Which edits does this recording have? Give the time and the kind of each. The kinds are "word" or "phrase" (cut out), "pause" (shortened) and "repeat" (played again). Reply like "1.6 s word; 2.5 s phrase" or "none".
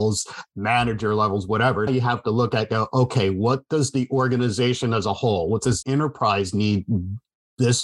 1.9 s word; 5.8 s word